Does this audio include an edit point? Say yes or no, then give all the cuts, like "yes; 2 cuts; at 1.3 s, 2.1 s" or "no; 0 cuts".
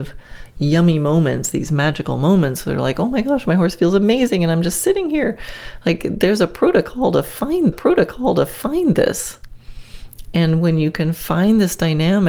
yes; 1 cut; at 7.7 s